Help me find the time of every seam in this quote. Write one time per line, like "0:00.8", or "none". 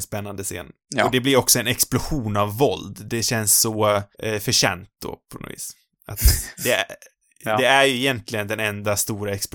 0:04.1
0:06.6